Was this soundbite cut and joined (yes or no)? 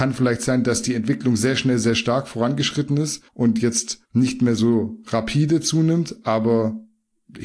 yes